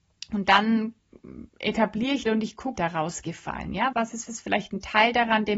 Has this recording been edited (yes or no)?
yes